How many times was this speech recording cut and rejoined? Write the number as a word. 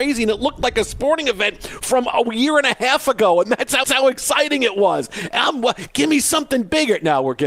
one